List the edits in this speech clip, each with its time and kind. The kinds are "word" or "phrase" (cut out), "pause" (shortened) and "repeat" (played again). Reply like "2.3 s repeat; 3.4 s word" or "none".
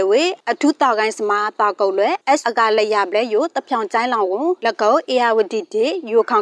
2.4 s word